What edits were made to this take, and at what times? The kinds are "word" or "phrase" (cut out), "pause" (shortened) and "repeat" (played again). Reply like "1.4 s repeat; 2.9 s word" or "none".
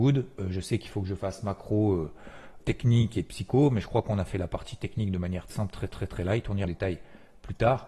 2.6 s word; 5.5 s phrase; 5.9 s repeat; 6.6 s phrase